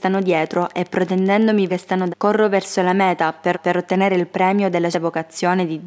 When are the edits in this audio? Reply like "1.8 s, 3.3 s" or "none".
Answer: 1.7 s, 2.1 s, 3.5 s, 4.9 s